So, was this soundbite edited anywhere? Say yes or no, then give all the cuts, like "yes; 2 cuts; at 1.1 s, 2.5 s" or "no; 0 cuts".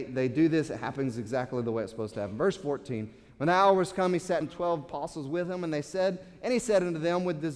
yes; 1 cut; at 4.4 s